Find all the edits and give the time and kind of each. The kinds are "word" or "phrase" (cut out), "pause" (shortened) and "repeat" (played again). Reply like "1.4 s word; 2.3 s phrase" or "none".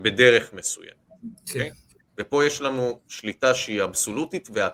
2.1 s pause